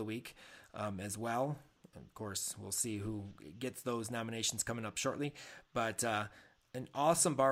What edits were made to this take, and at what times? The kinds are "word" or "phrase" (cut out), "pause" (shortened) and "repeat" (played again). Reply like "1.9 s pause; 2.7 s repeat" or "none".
none

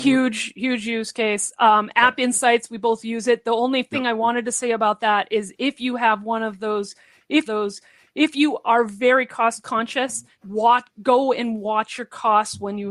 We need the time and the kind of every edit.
7.4 s repeat; 10.3 s pause

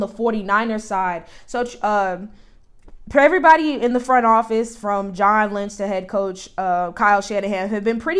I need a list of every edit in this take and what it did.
none

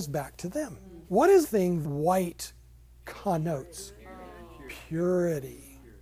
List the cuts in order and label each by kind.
1.0 s pause; 1.4 s word; 1.8 s word

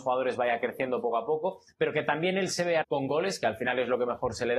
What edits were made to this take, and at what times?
2.8 s word

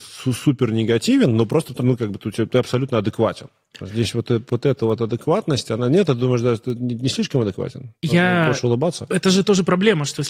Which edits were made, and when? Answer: 1.8 s word

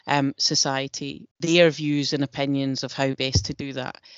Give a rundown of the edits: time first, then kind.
1.3 s pause

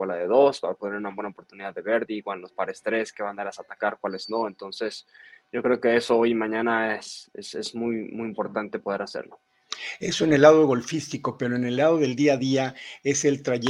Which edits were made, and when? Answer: none

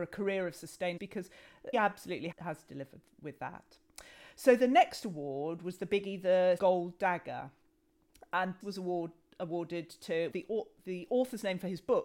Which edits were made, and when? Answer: 1.0 s word; 1.7 s word; 2.3 s word; 6.6 s word; 8.6 s word; 10.3 s word

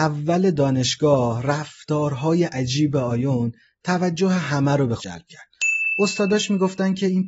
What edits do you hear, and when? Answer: 5.0 s word

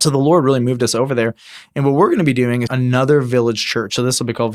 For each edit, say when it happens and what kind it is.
2.7 s word

